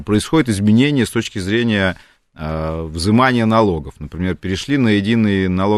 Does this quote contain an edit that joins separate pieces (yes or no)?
no